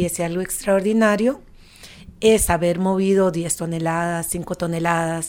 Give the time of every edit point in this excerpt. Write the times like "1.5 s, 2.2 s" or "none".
none